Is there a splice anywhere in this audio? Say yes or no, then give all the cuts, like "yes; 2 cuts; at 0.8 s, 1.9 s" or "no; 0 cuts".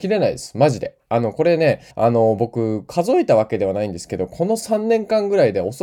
yes; 1 cut; at 1.9 s